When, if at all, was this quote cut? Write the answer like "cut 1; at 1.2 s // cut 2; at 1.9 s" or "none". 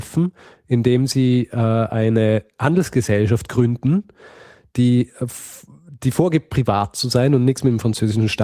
none